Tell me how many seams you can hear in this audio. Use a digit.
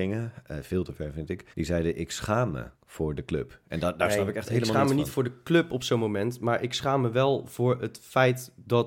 2